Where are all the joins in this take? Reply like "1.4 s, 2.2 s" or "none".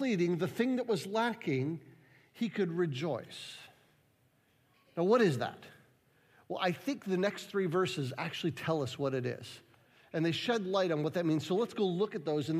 none